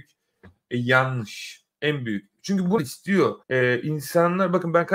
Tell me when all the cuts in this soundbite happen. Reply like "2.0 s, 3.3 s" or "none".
2.8 s, 3.4 s